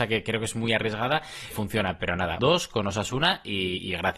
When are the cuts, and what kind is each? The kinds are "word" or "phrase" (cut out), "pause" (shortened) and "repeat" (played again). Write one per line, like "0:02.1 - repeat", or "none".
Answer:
0:01.5 - word
0:02.4 - word